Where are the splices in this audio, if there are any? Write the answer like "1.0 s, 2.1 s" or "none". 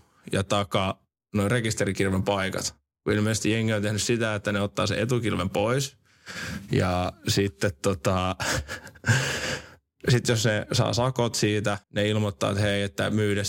11.8 s

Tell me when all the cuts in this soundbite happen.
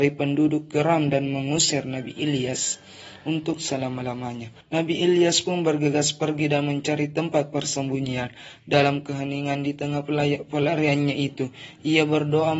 4.6 s

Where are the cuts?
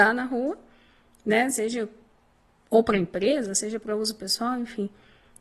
none

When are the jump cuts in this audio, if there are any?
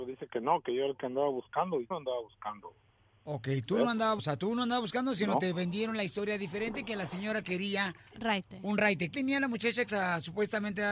1.9 s, 4.2 s, 9.1 s, 9.9 s

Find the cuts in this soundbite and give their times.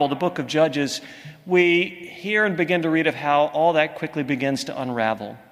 none

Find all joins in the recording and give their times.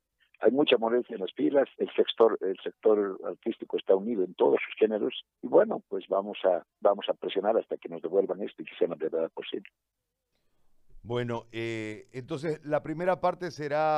1.7 s, 5.3 s, 6.7 s

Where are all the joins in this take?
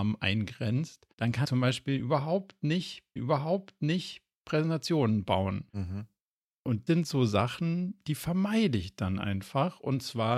1.1 s, 1.4 s, 3.2 s, 5.7 s, 6.9 s

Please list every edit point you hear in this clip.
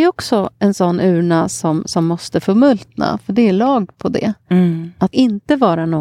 5.1 s

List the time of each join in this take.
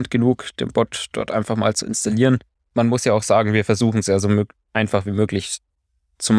2.5 s

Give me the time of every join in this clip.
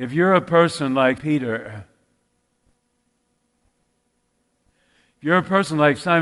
1.2 s

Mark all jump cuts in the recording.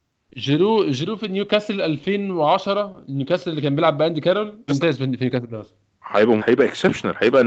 4.7 s, 6.4 s

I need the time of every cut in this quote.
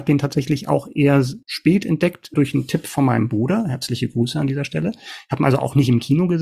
1.4 s, 2.3 s

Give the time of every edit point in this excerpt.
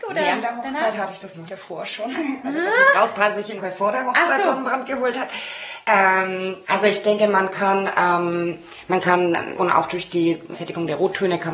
1.5 s, 3.6 s, 6.6 s, 9.6 s, 10.5 s

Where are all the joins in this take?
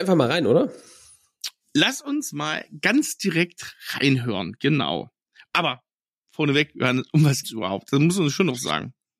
7.4 s

